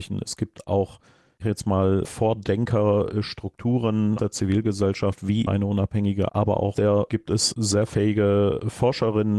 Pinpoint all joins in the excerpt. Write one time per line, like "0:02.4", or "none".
0:01.4
0:04.2
0:05.5
0:06.3
0:06.7
0:07.1

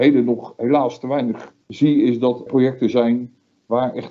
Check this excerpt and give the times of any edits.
0:01.6
0:02.5

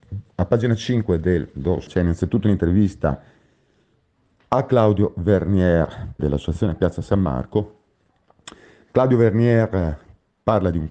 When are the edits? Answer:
0:01.9
0:06.2

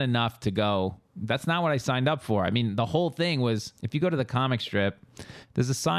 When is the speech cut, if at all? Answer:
0:03.8

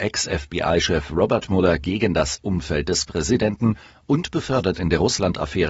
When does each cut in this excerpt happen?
none

